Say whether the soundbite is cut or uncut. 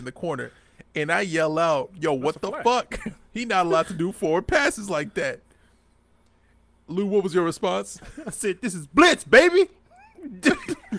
uncut